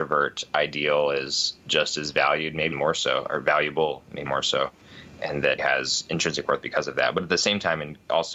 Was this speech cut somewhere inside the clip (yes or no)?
yes